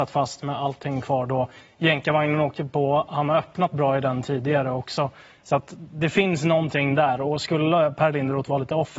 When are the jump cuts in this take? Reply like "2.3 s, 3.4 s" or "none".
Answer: none